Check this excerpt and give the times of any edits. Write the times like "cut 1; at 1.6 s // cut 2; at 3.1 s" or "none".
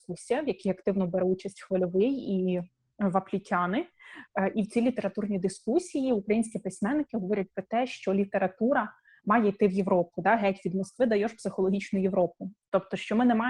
none